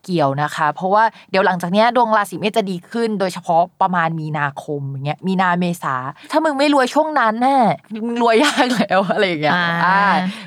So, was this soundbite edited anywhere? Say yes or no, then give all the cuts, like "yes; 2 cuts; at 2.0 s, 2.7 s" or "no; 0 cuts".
yes; 1 cut; at 7.8 s